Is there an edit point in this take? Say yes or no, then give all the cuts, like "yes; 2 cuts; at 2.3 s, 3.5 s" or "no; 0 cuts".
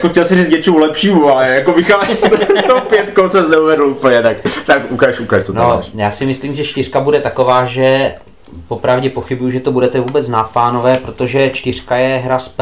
no; 0 cuts